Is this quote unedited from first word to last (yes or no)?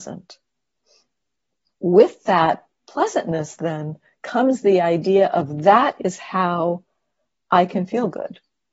yes